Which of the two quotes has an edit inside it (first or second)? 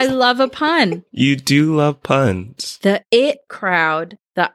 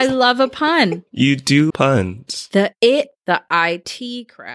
second